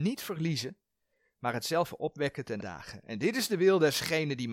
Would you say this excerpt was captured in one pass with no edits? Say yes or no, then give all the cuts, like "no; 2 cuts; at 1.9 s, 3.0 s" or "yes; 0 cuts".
no; 1 cut; at 2.6 s